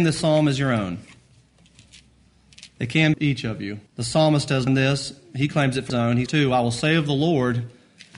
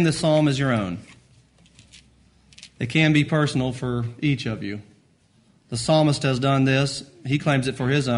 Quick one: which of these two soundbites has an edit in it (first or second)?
first